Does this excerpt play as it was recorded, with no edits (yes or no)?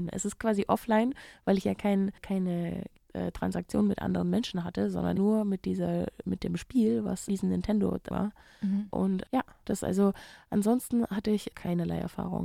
no